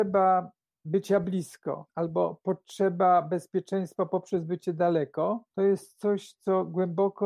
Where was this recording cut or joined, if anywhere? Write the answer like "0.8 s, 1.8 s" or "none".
1.9 s, 5.5 s